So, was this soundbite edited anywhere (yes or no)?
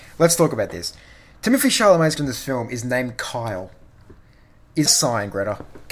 yes